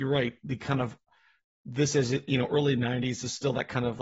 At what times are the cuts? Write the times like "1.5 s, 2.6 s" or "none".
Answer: none